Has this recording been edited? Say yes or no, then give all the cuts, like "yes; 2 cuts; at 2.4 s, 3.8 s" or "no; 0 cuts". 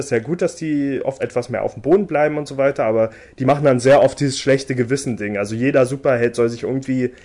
yes; 1 cut; at 1.2 s